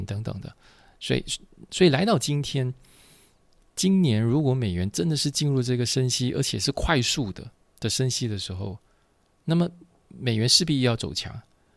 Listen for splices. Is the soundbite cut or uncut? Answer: uncut